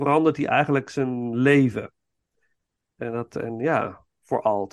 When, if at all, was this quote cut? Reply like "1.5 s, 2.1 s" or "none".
none